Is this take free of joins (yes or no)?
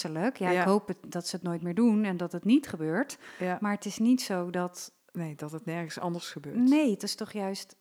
yes